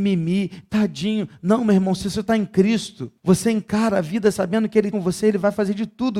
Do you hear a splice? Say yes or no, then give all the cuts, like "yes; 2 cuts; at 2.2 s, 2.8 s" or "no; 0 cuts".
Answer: yes; 2 cuts; at 3.2 s, 4.9 s